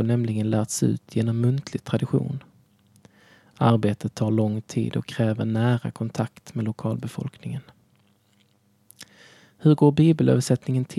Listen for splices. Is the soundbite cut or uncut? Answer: uncut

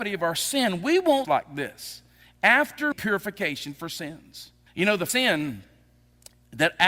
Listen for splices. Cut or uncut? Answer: cut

